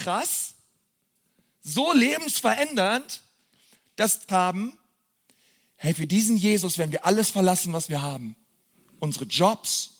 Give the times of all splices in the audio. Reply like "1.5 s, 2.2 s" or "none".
4.3 s